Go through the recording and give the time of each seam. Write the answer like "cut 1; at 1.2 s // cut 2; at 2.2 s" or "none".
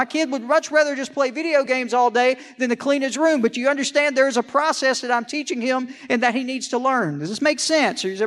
none